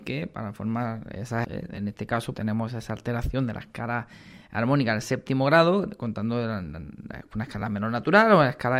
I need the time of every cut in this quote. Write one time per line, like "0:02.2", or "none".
0:01.4
0:02.3